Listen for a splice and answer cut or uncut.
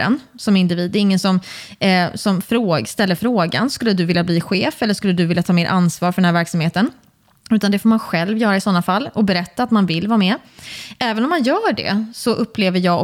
uncut